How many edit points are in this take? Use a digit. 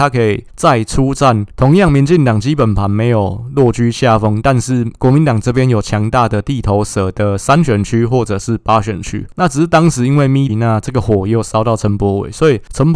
1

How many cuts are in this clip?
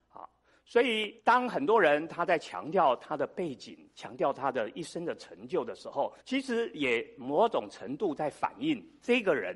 2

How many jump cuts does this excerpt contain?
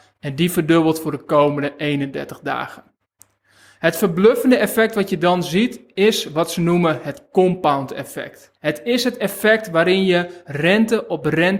1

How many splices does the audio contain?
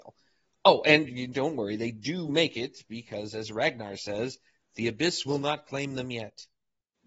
0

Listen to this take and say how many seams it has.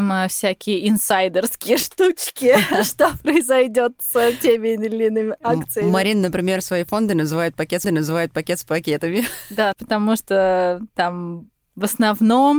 2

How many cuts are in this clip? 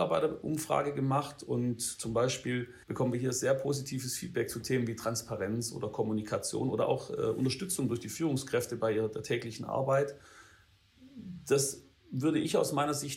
1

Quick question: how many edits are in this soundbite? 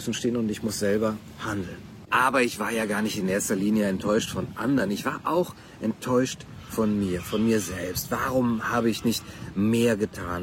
0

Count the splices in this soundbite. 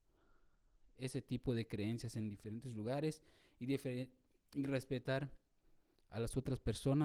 0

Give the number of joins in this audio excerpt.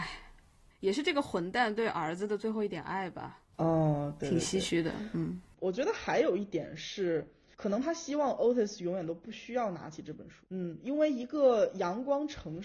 0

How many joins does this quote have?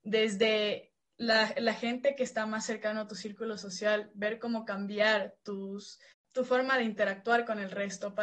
0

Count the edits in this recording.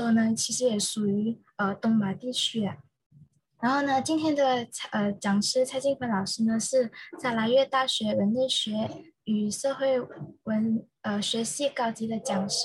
0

